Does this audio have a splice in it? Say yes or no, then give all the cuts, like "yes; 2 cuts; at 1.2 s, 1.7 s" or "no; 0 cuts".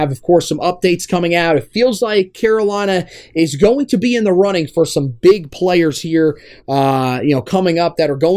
no; 0 cuts